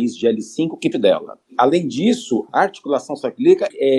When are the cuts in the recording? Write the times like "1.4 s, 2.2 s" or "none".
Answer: 0.9 s, 2.5 s